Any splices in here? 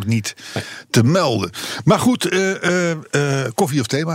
no; 0 cuts

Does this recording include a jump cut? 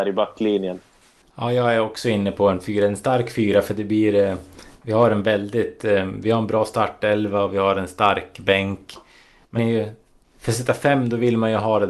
yes; 2 cuts; at 9.6 s, 10.2 s

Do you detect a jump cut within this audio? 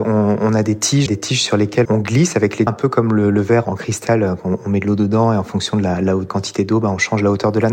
yes; 5 cuts; at 1.1 s, 1.8 s, 2.7 s, 3.6 s, 6.3 s

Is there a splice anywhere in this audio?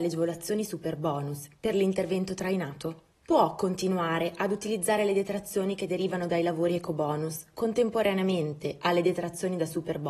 yes; 1 cut; at 3.1 s

